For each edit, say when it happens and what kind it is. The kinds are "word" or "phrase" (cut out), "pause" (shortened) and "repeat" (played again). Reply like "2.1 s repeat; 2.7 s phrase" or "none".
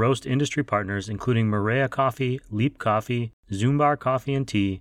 none